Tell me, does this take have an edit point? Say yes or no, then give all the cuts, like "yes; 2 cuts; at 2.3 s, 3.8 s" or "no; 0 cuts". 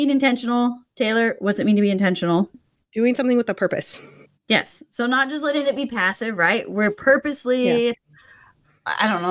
no; 0 cuts